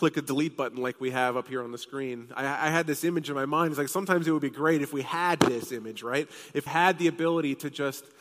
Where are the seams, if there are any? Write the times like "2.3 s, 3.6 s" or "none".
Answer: 6.7 s